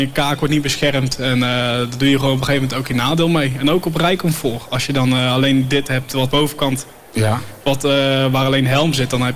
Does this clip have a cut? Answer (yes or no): yes